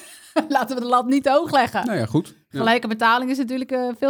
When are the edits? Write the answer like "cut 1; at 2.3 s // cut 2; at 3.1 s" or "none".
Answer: none